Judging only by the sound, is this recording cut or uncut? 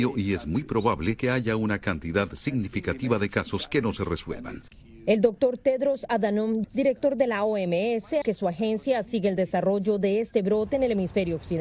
cut